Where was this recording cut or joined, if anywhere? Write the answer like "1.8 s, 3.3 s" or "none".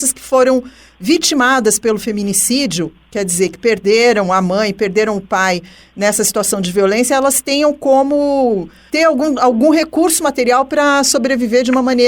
none